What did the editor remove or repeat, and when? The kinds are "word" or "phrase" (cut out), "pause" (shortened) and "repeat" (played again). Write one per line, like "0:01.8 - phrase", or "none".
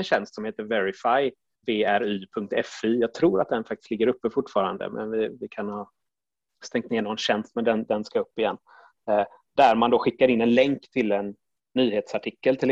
0:01.6 - word

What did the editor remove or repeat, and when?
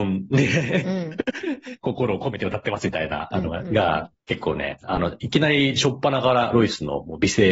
0:04.1 - pause

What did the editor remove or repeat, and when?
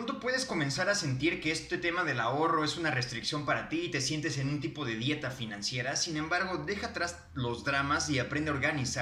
none

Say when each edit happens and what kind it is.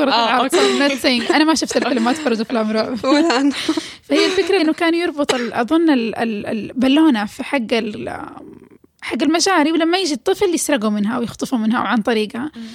0:04.6 - word
0:08.0 - word

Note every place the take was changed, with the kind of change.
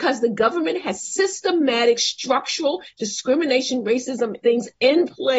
0:04.4 - word

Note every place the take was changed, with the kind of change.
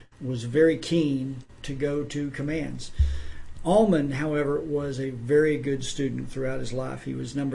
none

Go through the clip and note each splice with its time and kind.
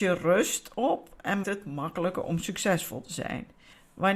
0:01.4 - word

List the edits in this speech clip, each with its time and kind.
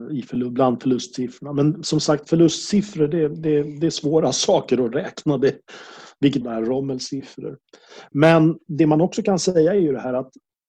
0:06.4 - phrase

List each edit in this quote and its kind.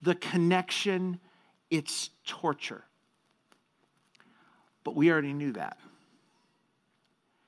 none

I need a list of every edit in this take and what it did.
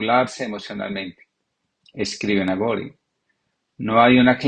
none

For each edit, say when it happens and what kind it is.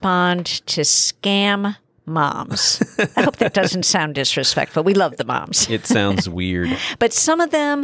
none

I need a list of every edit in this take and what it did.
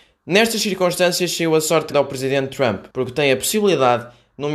0:01.9 - word
0:02.9 - pause

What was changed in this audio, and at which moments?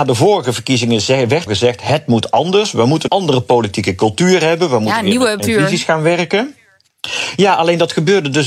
0:01.5 - word
0:03.1 - word
0:05.4 - word

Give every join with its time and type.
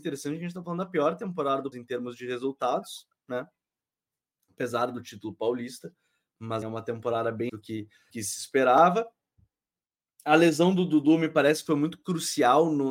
0:01.7 - word
0:06.6 - word
0:07.5 - word
0:08.1 - word

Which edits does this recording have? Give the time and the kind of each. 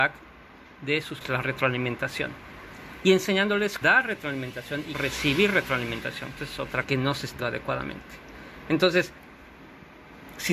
0:01.2 - word
0:03.8 - word
0:04.9 - word
0:06.4 - word
0:06.8 - word
0:07.4 - word

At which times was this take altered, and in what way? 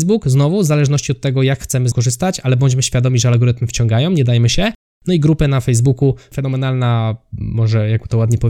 0:01.9 - word

